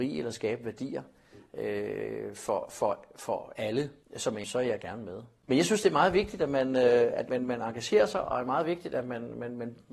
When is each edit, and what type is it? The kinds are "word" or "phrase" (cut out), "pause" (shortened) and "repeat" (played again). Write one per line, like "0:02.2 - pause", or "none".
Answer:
0:04.0 - pause
0:04.4 - phrase
0:07.3 - word